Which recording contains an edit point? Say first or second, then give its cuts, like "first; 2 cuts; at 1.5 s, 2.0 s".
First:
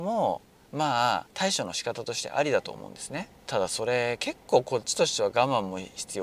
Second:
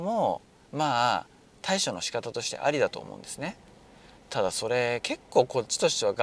first; 2 cuts; at 1.3 s, 3.4 s